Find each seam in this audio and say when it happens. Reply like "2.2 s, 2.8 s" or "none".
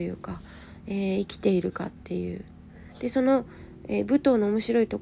none